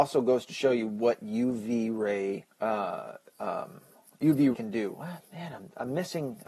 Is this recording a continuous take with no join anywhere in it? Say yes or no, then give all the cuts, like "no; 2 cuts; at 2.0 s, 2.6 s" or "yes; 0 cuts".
no; 2 cuts; at 2.5 s, 4.5 s